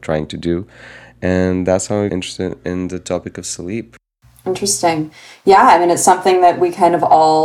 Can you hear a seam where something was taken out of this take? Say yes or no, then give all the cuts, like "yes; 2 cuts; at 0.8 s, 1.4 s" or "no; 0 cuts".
yes; 1 cut; at 2.1 s